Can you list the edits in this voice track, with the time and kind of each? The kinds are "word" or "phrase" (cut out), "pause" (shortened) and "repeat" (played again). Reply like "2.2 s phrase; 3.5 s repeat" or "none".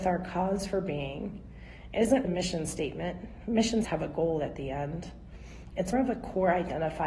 2.2 s word; 3.8 s word; 5.9 s word